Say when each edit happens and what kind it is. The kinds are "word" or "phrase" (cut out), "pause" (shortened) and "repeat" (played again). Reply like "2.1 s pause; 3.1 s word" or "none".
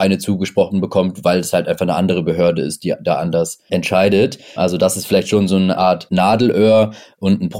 none